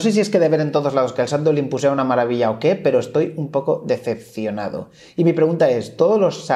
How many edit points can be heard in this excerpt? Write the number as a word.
zero